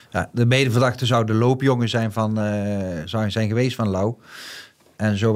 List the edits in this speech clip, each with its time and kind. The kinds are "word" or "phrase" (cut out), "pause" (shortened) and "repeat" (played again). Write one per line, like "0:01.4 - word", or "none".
none